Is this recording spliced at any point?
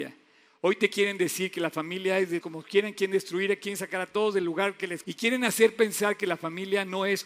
yes; 2 cuts; at 2.4 s, 5.0 s

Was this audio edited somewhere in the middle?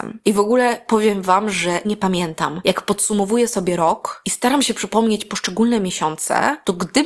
yes; 1 cut; at 1.8 s

